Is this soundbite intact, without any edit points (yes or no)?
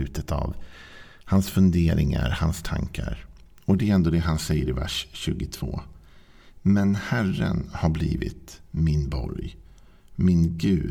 yes